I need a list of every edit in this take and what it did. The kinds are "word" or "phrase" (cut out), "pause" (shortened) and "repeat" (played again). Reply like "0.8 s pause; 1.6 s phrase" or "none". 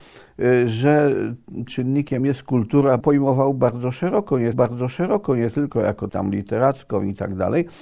1.7 s phrase; 2.2 s word; 3.0 s phrase; 4.5 s repeat; 6.1 s word